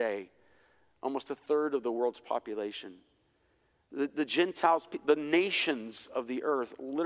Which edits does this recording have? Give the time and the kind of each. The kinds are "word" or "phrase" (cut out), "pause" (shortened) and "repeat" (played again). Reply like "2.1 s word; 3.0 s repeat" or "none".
none